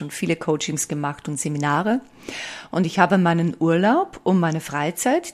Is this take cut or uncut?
uncut